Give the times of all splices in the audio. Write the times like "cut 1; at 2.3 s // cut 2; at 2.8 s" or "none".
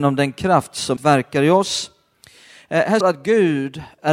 cut 1; at 1.0 s // cut 2; at 3.0 s